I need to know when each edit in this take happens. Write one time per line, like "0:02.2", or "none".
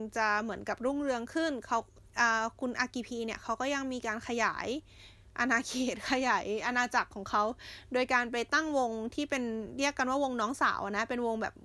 none

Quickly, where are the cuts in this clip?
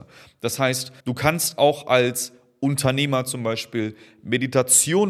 0:01.0

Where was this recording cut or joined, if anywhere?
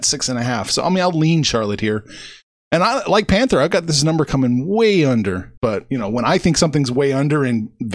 0:05.6

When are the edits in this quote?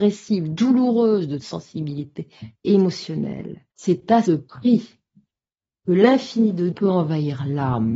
0:01.4
0:03.7
0:04.2
0:06.7

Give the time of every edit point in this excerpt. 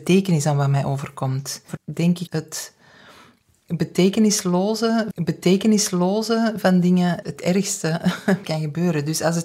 0:01.8
0:02.3
0:05.1
0:07.2
0:08.4

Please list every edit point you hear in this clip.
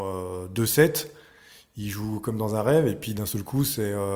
none

